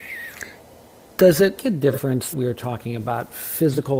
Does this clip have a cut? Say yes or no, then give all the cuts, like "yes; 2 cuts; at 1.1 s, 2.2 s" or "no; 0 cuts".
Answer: yes; 2 cuts; at 1.6 s, 2.3 s